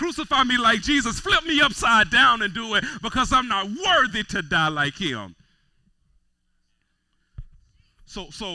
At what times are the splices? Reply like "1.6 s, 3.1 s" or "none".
none